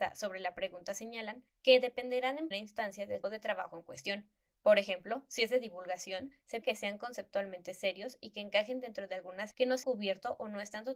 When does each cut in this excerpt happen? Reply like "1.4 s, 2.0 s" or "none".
2.5 s, 3.2 s, 6.6 s, 9.5 s, 9.8 s